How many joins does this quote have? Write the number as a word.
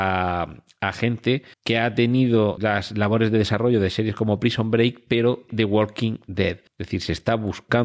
four